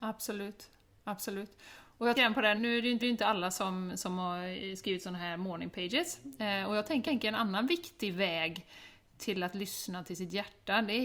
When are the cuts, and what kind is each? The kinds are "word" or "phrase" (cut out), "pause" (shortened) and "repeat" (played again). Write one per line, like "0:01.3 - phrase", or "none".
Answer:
0:02.1 - word
0:02.6 - word
0:03.0 - repeat
0:07.0 - repeat